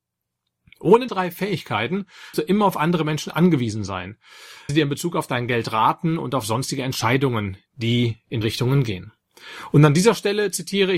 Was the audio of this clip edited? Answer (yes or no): yes